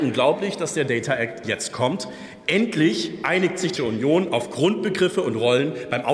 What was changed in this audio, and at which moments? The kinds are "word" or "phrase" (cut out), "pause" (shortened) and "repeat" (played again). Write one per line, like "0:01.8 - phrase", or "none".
0:01.4 - word
0:03.8 - word